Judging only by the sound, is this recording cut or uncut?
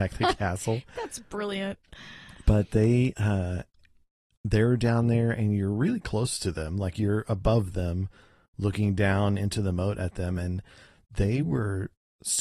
uncut